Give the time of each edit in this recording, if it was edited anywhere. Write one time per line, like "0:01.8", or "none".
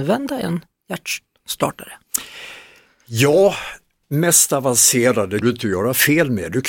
0:04.0
0:05.4